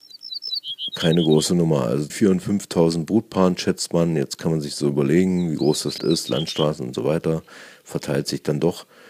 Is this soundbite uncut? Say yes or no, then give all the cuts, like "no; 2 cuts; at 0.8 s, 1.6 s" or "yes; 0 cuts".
no; 2 cuts; at 2.1 s, 6.0 s